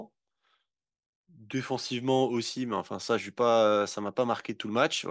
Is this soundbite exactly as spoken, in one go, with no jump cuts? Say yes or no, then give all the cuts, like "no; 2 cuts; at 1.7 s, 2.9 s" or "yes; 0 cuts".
yes; 0 cuts